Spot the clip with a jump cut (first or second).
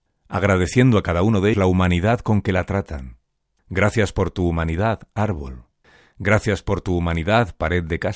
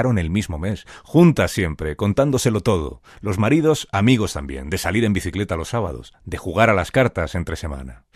first